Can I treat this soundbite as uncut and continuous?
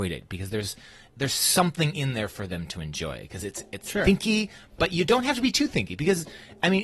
yes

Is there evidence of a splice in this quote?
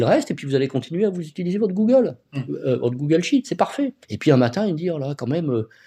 yes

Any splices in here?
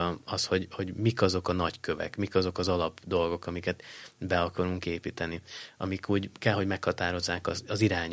no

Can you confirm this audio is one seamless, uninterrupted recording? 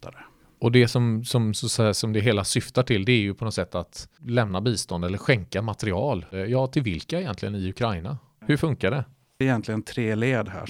yes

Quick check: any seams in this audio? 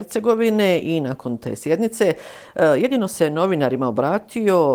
no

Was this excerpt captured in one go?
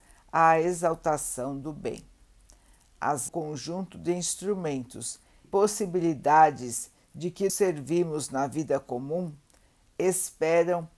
no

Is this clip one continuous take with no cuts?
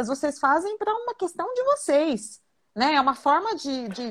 yes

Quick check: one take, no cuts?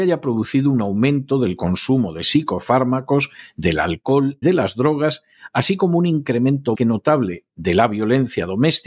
no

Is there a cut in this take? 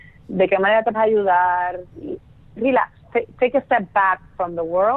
yes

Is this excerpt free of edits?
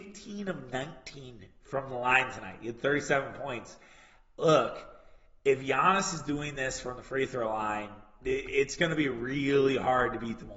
yes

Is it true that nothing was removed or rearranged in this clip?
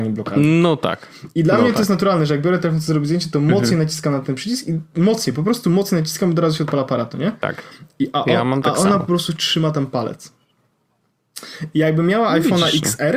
yes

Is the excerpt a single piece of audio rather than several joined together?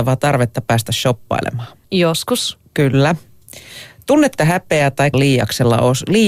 no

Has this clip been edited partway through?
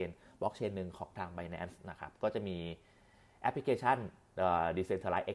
no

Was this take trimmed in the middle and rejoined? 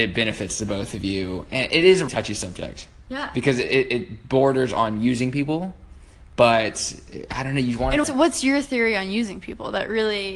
yes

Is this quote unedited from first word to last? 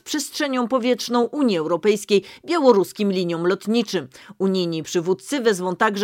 yes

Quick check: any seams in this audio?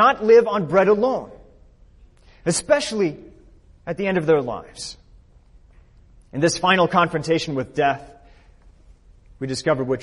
no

